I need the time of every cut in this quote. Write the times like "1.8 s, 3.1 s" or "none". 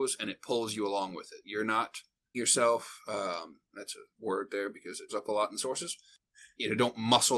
2.3 s, 4.1 s, 5.1 s